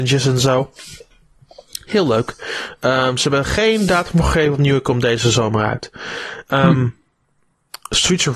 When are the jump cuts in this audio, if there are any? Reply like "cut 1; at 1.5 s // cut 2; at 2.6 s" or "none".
none